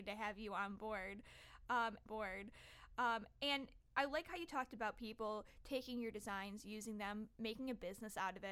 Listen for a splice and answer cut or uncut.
cut